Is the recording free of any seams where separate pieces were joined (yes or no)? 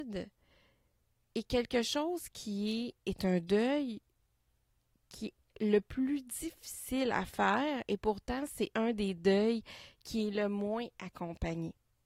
yes